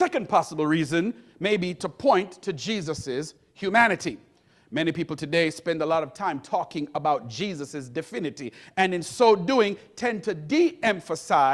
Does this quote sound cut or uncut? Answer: uncut